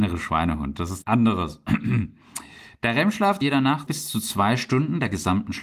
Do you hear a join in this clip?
yes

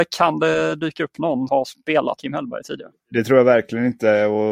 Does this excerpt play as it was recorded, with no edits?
no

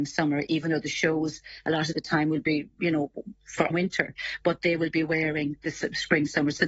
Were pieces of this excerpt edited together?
yes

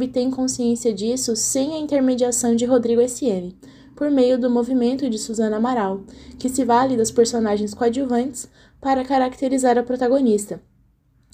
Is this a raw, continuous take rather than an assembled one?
yes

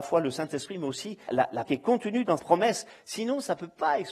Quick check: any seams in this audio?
yes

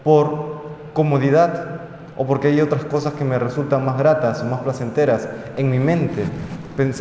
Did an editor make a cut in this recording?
no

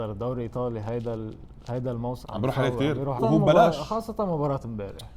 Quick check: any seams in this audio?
yes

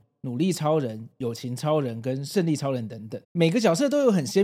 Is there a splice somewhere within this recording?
yes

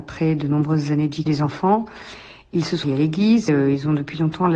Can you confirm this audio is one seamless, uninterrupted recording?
no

